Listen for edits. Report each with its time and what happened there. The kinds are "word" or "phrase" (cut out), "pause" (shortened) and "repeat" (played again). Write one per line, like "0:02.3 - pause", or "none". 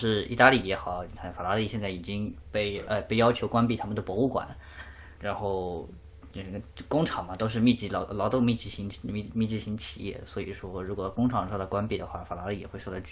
0:05.2 - word